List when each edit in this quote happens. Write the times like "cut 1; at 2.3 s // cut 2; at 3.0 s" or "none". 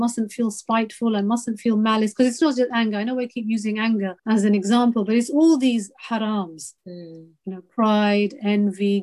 cut 1; at 4.2 s // cut 2; at 6.8 s